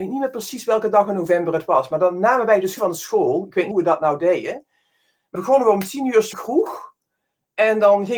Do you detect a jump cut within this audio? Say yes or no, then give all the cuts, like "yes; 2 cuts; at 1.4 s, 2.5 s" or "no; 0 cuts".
yes; 4 cuts; at 2.8 s, 3.7 s, 5.3 s, 6.3 s